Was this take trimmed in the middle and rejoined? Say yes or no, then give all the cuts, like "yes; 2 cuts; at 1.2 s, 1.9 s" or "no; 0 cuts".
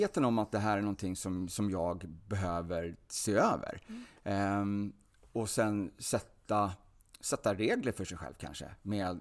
no; 0 cuts